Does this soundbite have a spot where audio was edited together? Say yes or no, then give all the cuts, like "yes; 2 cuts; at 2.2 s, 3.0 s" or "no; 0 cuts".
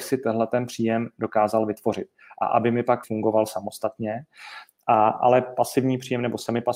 yes; 1 cut; at 3.0 s